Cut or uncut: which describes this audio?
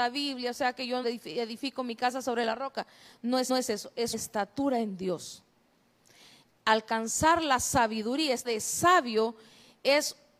cut